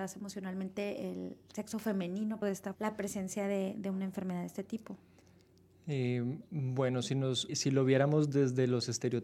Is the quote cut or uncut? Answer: cut